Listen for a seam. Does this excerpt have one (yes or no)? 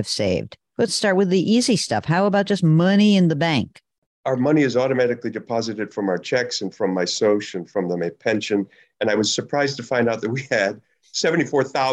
no